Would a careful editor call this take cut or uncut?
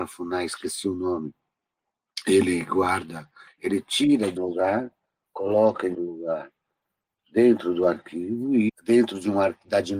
cut